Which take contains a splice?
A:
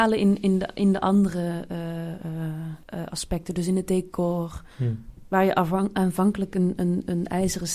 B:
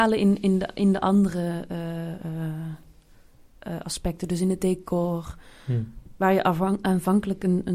A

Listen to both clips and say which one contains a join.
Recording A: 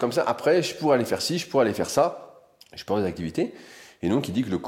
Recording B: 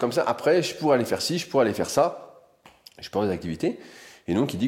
A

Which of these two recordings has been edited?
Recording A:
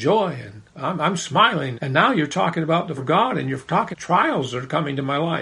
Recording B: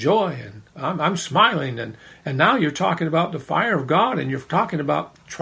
A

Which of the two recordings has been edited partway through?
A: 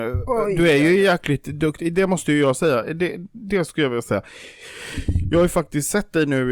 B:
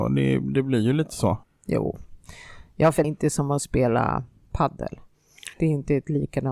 B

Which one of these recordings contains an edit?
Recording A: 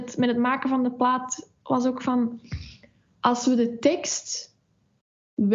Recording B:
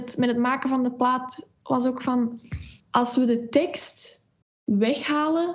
B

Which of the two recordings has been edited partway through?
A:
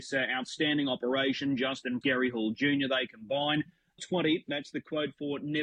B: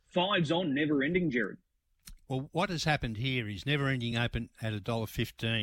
A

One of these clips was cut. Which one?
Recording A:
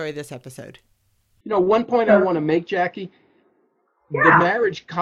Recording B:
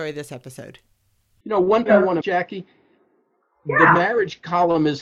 B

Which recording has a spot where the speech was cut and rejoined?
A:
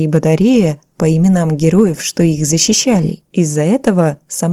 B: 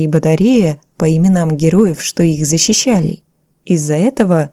A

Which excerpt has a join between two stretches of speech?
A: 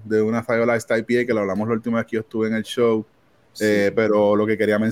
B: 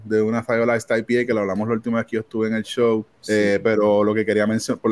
B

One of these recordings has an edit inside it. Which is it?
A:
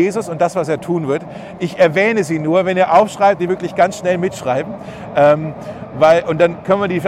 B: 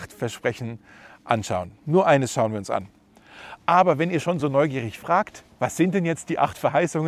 A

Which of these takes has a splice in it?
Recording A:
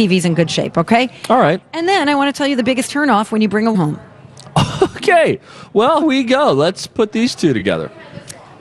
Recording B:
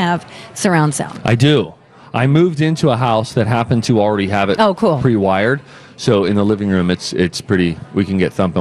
A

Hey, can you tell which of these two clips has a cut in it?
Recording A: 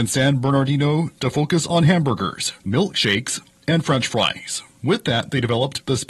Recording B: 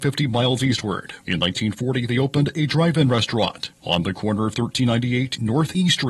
A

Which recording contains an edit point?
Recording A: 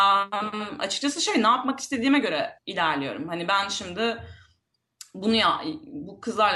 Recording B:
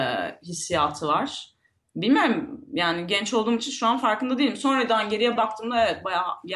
A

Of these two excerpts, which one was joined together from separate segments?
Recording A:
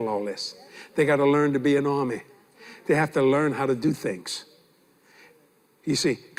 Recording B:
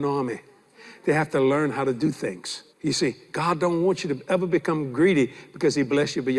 B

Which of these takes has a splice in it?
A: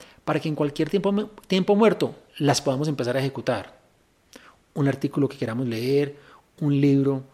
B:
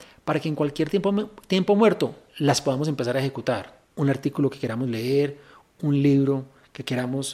B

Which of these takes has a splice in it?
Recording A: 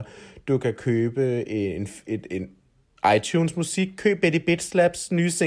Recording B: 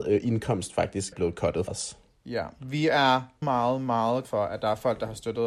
B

